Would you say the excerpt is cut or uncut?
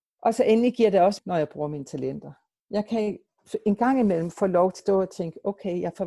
cut